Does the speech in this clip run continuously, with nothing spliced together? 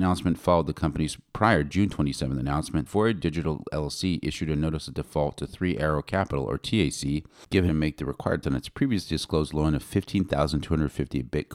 no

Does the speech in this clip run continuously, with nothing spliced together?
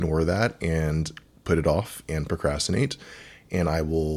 yes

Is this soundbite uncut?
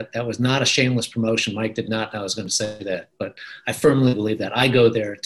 yes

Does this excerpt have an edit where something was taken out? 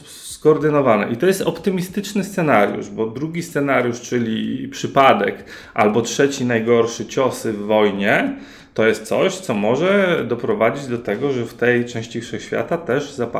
no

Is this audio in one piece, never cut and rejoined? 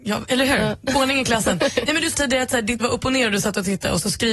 no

